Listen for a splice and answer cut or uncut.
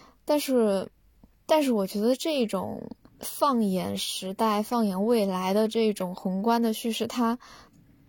cut